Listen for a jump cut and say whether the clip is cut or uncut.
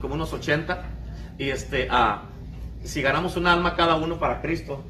uncut